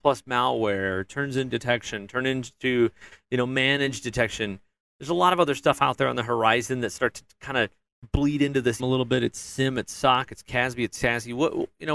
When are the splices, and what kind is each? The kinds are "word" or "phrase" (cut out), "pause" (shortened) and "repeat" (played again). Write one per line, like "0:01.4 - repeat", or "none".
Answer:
0:01.5 - word
0:08.8 - word